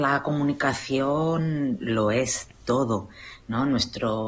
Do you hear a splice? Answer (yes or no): no